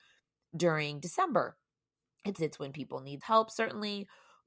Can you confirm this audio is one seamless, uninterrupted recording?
no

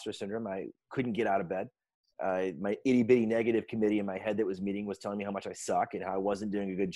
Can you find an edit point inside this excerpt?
no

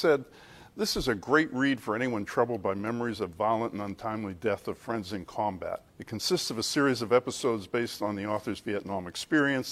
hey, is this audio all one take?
no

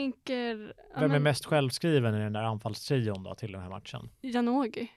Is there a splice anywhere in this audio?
no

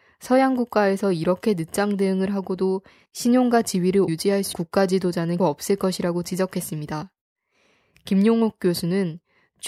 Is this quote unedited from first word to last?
no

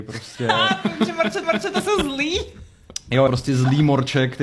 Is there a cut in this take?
yes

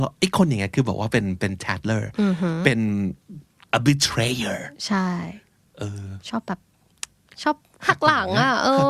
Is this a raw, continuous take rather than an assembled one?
yes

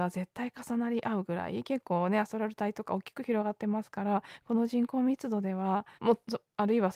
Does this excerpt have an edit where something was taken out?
yes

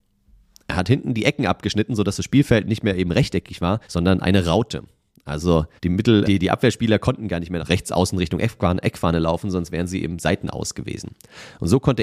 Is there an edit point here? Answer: yes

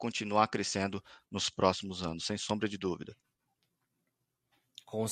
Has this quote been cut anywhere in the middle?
no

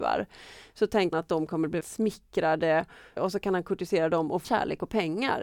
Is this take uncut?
no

